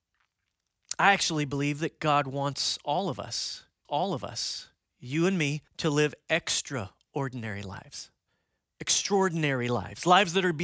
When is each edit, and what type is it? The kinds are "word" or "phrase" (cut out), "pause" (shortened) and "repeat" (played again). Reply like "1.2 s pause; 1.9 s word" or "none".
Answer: 3.8 s repeat; 5.7 s pause